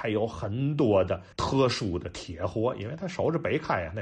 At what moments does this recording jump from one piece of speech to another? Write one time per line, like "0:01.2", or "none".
0:01.3